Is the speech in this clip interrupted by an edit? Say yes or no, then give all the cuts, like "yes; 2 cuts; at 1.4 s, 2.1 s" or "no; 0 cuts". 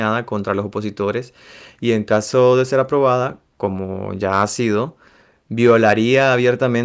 no; 0 cuts